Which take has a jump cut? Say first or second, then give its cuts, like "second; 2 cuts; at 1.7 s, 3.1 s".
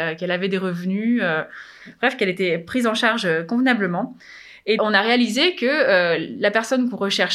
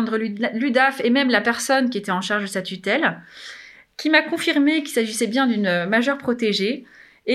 first; 1 cut; at 4.8 s